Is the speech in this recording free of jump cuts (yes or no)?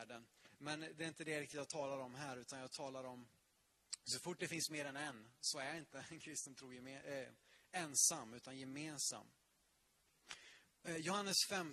yes